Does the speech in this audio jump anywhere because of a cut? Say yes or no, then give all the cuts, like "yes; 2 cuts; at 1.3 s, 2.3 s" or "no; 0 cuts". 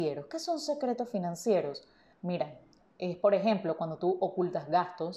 no; 0 cuts